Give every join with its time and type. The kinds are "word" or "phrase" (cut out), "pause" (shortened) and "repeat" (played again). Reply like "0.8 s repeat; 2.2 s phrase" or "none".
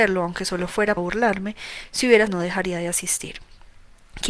1.0 s word; 2.3 s word